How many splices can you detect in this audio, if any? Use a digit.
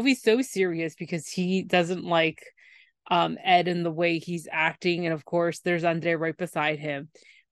0